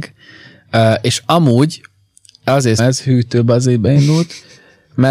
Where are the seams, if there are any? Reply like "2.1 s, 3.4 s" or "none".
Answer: 2.8 s